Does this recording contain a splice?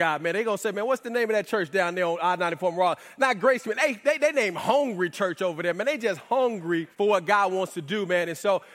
yes; 1 cut; at 6.9 s

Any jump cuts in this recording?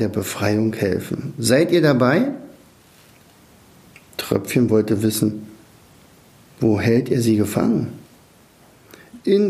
no; 0 cuts

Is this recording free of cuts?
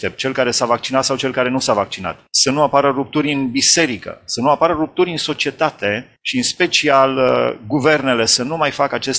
no; 2 cuts; at 2.3 s, 6.2 s

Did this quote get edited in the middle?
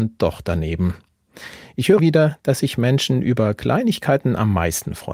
yes; 1 cut; at 2.0 s

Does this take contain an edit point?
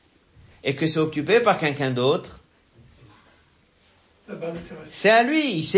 no; 0 cuts

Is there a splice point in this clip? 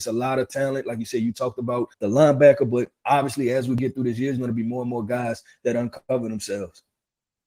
yes; 1 cut; at 1.9 s

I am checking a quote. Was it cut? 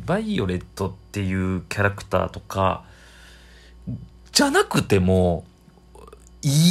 no; 0 cuts

